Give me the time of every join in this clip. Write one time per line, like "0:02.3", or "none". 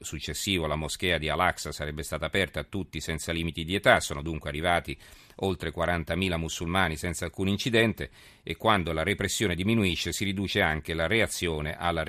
none